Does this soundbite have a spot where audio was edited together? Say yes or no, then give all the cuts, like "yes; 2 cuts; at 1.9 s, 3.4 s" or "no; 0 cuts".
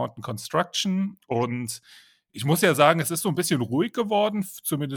no; 0 cuts